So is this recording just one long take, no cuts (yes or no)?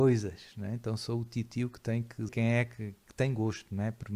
no